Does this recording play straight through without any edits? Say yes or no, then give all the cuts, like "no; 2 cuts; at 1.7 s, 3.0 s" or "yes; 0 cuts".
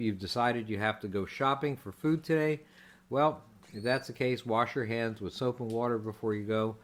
yes; 0 cuts